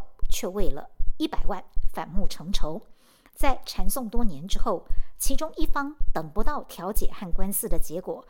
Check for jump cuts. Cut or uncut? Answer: uncut